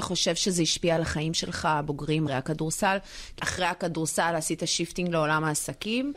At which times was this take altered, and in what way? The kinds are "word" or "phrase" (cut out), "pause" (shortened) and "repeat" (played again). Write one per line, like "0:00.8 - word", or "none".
0:02.3 - word
0:03.4 - word

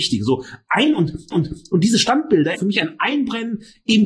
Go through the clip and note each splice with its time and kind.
0:01.3 - repeat
0:02.5 - word

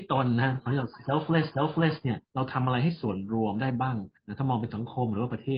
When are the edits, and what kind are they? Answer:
0:01.5 - repeat
0:02.3 - pause
0:04.2 - pause

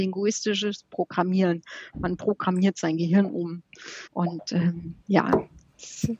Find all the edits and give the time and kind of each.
0:04.1 - pause
0:05.0 - pause

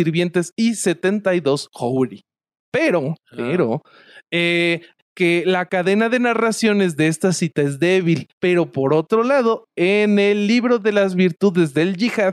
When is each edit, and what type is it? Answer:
0:05.0 - phrase
0:08.3 - pause

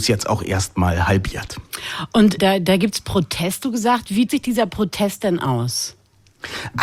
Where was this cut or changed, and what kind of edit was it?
0:02.4 - word
0:03.6 - word
0:04.3 - word

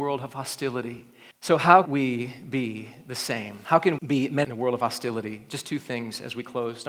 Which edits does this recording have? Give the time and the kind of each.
0:01.3 - pause
0:01.9 - word
0:04.0 - word
0:04.4 - phrase

